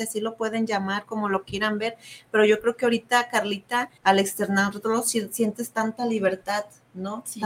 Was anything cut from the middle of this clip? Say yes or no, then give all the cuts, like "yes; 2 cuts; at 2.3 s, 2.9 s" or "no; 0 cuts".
yes; 1 cut; at 4.0 s